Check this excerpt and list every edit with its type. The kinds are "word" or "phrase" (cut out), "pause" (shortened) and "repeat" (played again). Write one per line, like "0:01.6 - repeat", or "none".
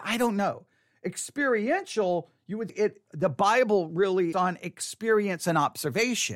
0:02.7 - word
0:04.3 - phrase